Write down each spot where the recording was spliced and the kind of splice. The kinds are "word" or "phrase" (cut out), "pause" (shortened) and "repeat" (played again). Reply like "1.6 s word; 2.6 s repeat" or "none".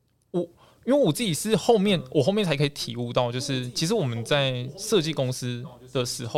none

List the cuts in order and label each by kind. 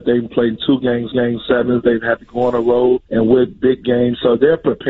1.1 s repeat; 3.1 s pause; 3.5 s word

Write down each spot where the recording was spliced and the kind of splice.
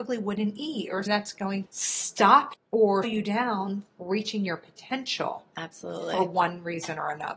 1.1 s word; 1.7 s word; 2.5 s word; 3.0 s word; 3.9 s word

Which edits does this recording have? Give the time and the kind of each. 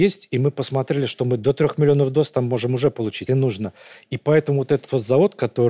3.3 s word

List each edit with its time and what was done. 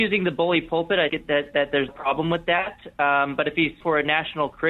1.1 s word; 1.9 s word; 3.8 s word

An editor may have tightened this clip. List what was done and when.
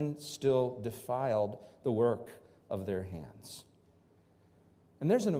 none

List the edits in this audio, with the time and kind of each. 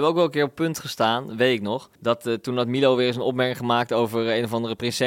1.9 s pause

